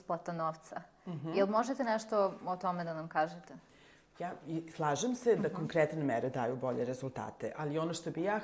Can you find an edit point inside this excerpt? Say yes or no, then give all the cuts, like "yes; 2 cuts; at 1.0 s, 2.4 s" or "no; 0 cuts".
no; 0 cuts